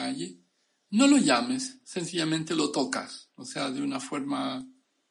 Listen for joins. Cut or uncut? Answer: uncut